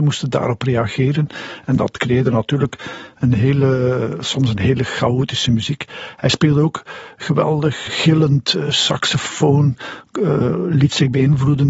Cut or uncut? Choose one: cut